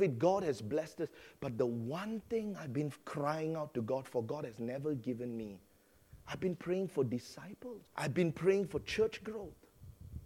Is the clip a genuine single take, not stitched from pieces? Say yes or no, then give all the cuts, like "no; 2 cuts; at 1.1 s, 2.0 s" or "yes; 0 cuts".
no; 1 cut; at 7.9 s